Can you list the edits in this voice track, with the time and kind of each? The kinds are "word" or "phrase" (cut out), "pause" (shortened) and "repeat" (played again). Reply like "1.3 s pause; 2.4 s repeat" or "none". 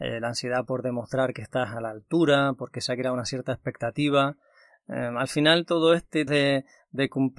6.3 s word